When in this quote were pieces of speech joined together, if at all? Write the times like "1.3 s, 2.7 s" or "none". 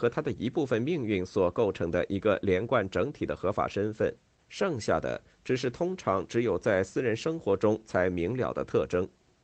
4.4 s

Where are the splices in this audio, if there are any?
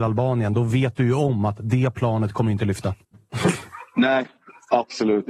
3.0 s

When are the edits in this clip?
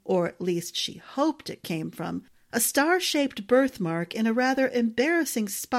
none

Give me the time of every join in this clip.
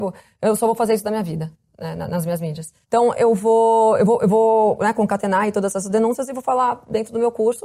2.8 s

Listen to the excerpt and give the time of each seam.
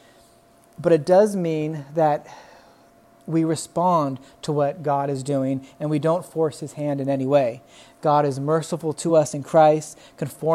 none

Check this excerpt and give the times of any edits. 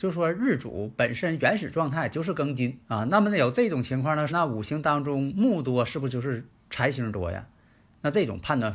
2.8 s, 4.3 s

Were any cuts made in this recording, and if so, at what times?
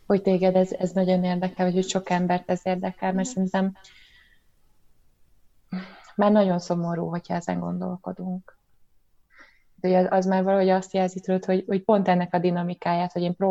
none

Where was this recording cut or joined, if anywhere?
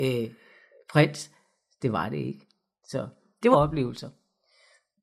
3.5 s

